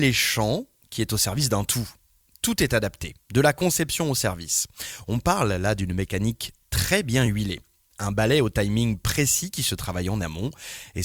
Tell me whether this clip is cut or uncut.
uncut